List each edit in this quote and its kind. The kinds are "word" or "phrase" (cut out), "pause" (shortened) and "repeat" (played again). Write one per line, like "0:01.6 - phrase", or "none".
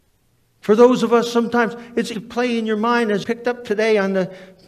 0:02.1 - word
0:03.2 - word